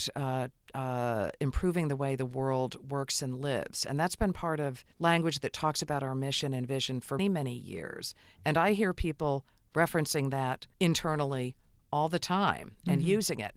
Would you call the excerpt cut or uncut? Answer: cut